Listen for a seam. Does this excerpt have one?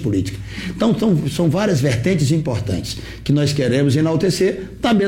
no; 0 cuts

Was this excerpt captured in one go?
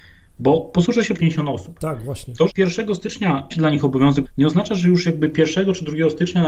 no; 4 cuts; at 1.2 s, 2.5 s, 3.5 s, 4.2 s

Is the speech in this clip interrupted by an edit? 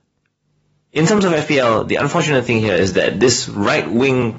no; 0 cuts

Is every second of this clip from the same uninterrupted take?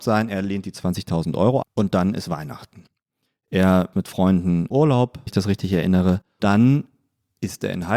no; 5 cuts; at 1.6 s, 3.9 s, 4.7 s, 5.3 s, 6.4 s

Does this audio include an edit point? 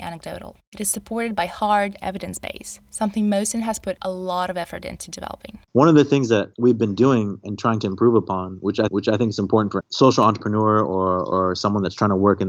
yes; 5 cuts; at 2.0 s, 5.6 s, 6.5 s, 8.9 s, 9.8 s

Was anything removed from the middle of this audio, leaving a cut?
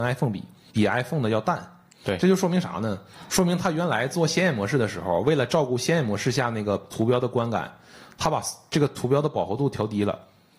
no; 0 cuts

